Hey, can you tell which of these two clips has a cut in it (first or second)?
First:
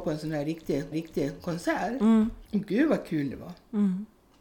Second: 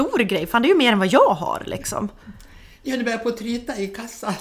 first